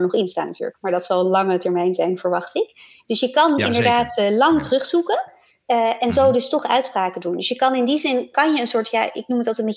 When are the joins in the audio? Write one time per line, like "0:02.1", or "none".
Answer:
none